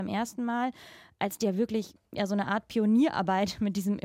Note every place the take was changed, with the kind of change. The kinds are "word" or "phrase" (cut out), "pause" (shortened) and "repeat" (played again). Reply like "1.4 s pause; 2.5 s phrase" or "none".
2.0 s pause